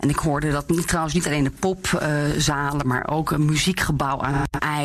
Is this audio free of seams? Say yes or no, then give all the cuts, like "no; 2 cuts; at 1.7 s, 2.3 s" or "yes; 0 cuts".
yes; 0 cuts